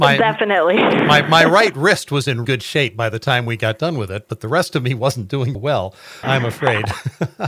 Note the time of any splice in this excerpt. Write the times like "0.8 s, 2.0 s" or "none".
2.4 s, 5.5 s, 6.2 s